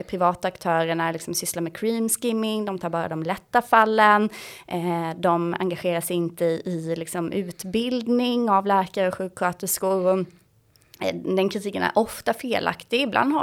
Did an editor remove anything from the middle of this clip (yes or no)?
no